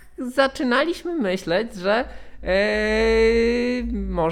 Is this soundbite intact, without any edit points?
yes; 0 cuts

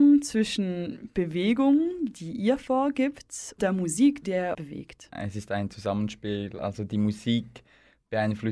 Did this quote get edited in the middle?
yes; 3 cuts; at 3.6 s, 4.2 s, 4.5 s

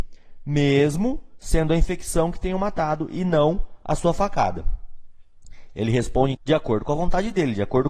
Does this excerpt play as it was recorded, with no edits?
no; 1 cut; at 6.3 s

